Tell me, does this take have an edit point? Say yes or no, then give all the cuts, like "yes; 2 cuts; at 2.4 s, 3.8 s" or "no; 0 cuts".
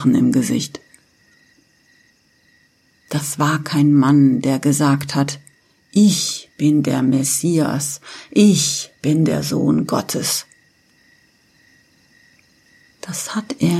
no; 0 cuts